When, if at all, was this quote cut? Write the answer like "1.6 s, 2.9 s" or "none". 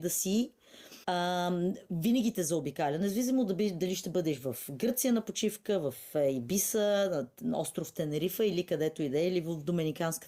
1.0 s